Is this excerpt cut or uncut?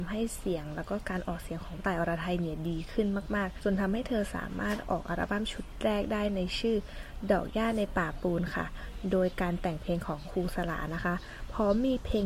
cut